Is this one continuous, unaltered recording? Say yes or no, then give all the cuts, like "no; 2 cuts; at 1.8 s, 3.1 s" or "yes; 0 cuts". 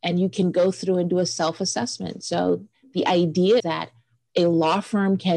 no; 1 cut; at 3.6 s